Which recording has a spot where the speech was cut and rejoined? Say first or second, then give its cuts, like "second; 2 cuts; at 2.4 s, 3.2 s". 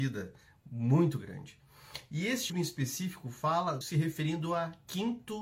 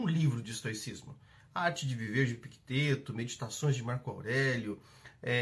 first; 2 cuts; at 2.5 s, 3.8 s